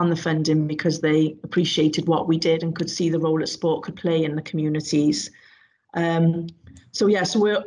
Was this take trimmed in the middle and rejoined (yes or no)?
no